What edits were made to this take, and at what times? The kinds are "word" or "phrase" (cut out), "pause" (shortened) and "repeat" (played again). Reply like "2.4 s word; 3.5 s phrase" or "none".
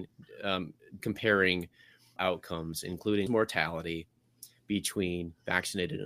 1.0 s word; 2.2 s word; 3.3 s word

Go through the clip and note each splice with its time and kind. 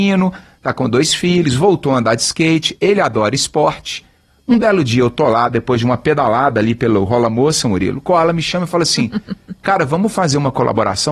none

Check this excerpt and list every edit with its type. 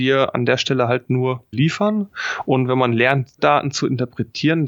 1.5 s word; 3.4 s word

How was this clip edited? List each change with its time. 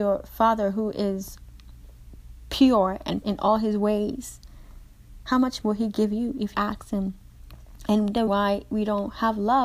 3.2 s word; 5.6 s word; 6.5 s word; 8.3 s word

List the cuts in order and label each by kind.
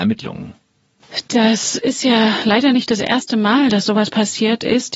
none

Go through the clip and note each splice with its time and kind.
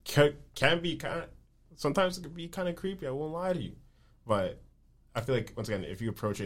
none

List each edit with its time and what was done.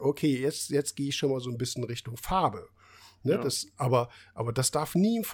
none

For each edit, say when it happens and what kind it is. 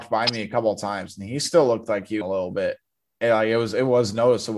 2.2 s phrase

